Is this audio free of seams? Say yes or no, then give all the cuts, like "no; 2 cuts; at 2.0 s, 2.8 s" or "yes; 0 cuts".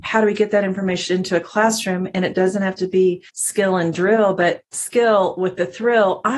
no; 2 cuts; at 3.3 s, 4.6 s